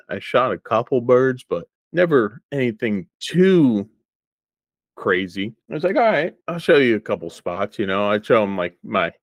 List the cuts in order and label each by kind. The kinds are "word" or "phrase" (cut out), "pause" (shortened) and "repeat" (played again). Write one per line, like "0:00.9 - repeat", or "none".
0:01.8 - pause
0:03.1 - pause
0:05.6 - pause
0:06.4 - pause

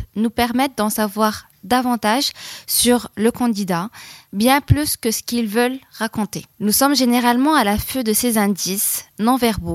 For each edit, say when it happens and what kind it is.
0:06.5 - pause

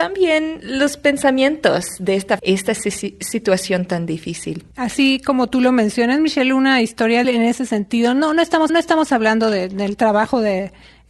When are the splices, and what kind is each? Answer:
0:02.4 - phrase
0:04.7 - pause
0:07.2 - word
0:08.7 - repeat

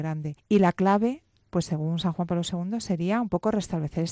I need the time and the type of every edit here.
none

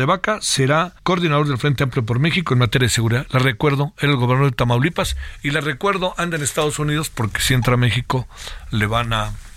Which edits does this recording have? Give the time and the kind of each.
0:01.0 - pause

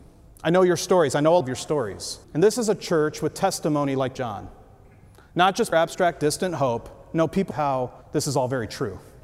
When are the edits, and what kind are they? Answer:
0:01.4 - word
0:02.2 - pause
0:04.1 - phrase
0:05.7 - phrase
0:07.5 - phrase
0:08.0 - pause

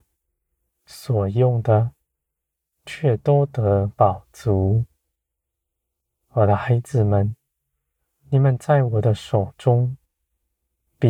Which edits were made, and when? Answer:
none

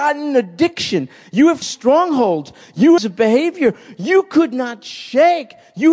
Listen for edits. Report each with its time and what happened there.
0:01.6 - word
0:03.0 - phrase

